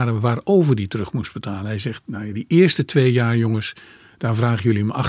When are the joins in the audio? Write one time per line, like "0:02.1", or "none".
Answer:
none